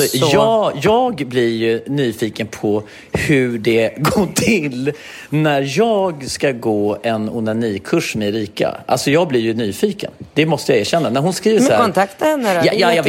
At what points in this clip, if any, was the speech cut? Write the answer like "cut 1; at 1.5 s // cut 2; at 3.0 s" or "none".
none